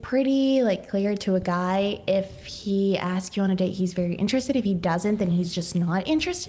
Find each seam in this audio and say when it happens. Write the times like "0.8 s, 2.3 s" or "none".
none